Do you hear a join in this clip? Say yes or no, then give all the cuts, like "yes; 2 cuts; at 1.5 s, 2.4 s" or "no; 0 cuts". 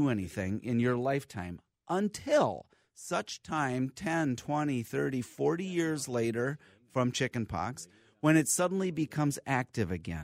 no; 0 cuts